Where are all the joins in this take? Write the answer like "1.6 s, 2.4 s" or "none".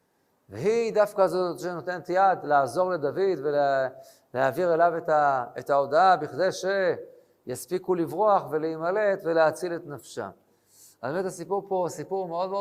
none